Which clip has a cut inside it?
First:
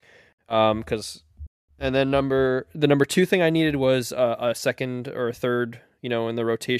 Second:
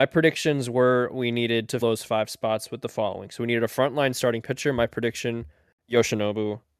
second; 1 cut; at 1.8 s

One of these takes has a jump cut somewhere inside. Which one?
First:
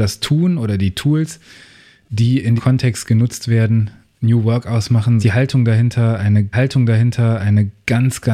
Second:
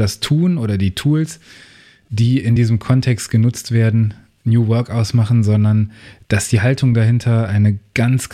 first; 3 cuts; at 2.6 s, 5.2 s, 6.5 s

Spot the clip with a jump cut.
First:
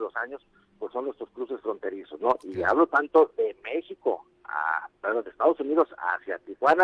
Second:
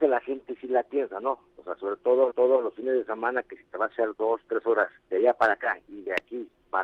second; 2 cuts; at 2.3 s, 5.0 s

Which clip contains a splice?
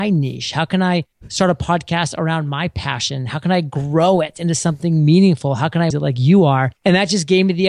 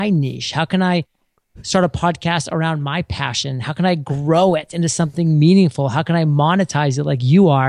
first; 3 cuts; at 1.1 s, 5.9 s, 6.8 s

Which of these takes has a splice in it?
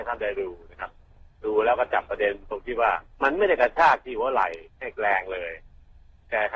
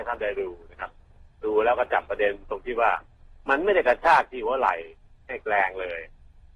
first; 2 cuts; at 3.1 s, 4.7 s

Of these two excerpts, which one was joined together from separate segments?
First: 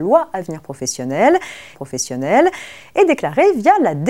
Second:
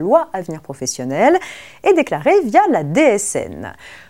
first; 1 cut; at 1.7 s

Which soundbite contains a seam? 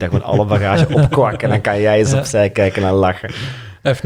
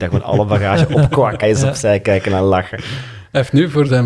second; 1 cut; at 1.4 s

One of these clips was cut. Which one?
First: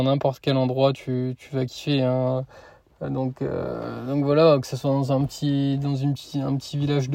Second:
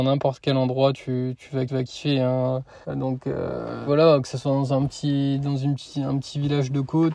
second; 3 cuts; at 1.7 s, 2.8 s, 3.9 s

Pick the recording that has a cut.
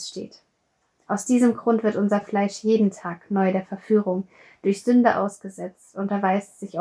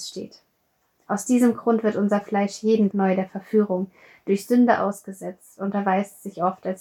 second; 1 cut; at 2.9 s

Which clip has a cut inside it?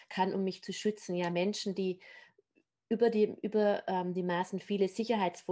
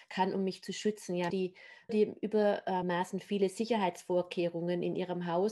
second; 3 cuts; at 1.3 s, 1.9 s, 2.8 s

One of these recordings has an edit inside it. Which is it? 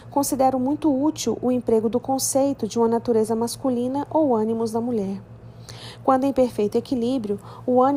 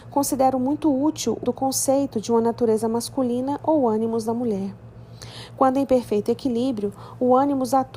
second; 1 cut; at 1.4 s

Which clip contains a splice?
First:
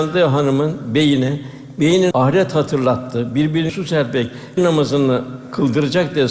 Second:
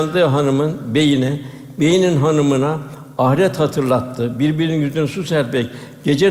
first; 3 cuts; at 2.1 s, 3.7 s, 4.6 s

